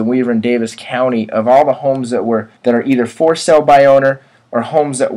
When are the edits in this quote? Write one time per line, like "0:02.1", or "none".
0:02.6